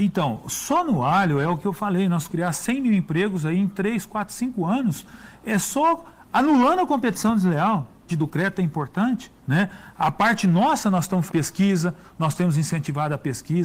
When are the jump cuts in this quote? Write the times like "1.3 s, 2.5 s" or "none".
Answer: 2.3 s, 8.1 s, 9.4 s, 11.3 s